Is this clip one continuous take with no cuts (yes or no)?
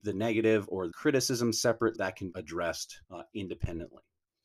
no